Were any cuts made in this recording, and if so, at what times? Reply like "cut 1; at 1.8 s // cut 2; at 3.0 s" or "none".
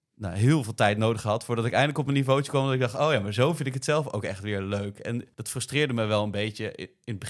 cut 1; at 5.3 s